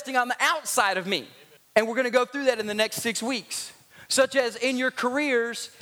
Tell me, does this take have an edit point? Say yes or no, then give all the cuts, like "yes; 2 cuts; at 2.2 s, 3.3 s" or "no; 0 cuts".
no; 0 cuts